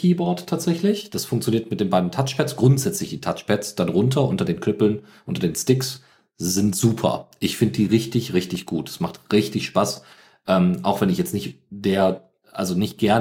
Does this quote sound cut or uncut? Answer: uncut